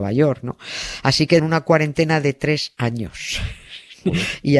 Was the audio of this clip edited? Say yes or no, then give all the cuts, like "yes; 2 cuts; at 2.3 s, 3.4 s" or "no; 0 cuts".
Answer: yes; 1 cut; at 1.4 s